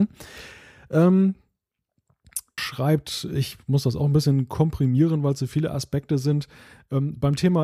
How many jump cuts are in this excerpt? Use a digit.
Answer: 1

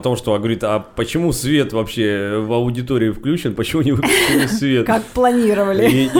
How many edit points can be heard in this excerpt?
0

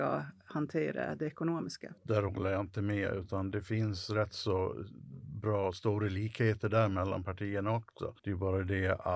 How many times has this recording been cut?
2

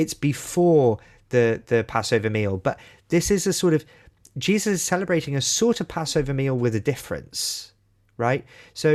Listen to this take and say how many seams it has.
0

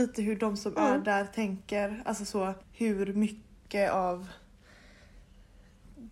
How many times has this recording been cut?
1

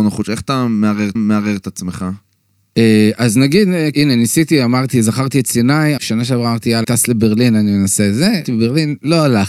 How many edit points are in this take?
5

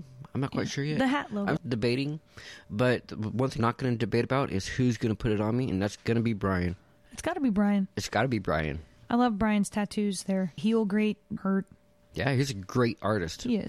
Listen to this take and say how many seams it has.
4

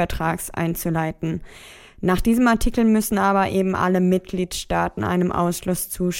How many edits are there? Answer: 0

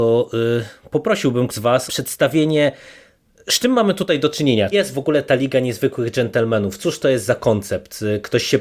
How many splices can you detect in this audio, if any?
3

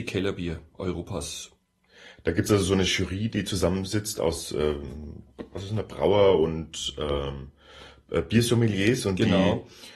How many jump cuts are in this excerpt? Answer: 0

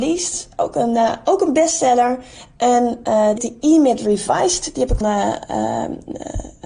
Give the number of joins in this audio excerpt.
2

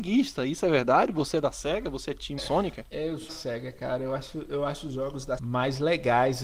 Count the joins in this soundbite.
3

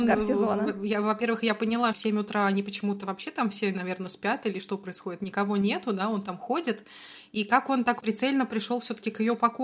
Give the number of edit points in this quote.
2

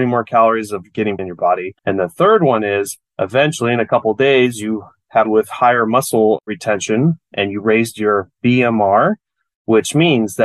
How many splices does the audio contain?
3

